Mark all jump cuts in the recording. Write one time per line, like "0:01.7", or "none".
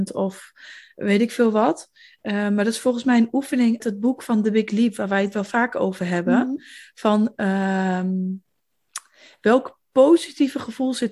0:03.8